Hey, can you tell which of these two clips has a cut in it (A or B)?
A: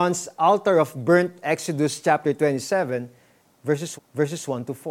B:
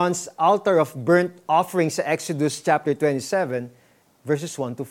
A